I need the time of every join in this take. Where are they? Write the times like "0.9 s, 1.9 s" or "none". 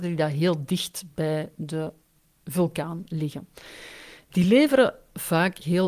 none